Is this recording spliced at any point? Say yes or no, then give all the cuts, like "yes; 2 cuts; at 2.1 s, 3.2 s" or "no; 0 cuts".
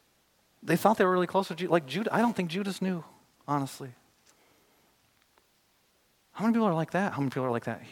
no; 0 cuts